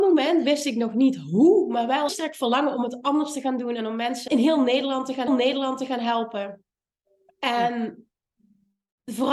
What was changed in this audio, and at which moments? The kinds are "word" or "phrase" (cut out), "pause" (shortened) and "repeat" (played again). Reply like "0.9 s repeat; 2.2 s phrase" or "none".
2.1 s phrase; 4.3 s word; 5.3 s repeat